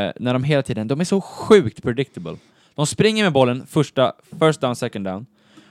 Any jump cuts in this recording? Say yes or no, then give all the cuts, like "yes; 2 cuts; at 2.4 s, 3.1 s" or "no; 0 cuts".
no; 0 cuts